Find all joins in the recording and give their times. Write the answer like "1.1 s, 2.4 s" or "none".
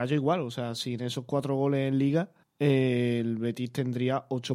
2.4 s